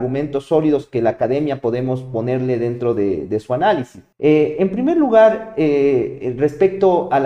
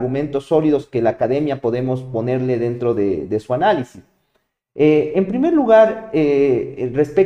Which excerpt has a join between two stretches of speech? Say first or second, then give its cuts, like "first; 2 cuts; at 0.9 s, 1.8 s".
first; 1 cut; at 4.1 s